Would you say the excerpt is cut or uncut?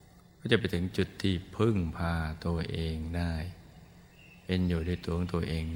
uncut